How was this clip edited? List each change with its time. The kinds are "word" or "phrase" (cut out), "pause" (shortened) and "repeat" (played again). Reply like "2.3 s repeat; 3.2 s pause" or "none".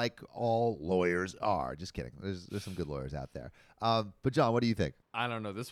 none